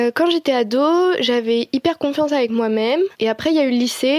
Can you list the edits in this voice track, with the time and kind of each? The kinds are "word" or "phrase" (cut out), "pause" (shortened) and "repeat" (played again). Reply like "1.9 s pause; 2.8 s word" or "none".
3.1 s pause